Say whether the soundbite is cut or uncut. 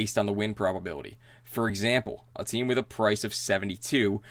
uncut